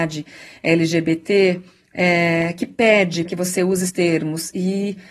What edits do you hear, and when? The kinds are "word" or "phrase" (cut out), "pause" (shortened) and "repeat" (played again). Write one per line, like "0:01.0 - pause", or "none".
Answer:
0:03.3 - word
0:03.9 - word